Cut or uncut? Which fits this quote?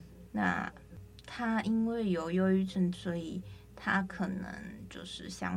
cut